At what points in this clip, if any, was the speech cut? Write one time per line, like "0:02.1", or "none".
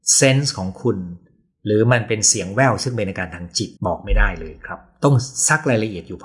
0:03.8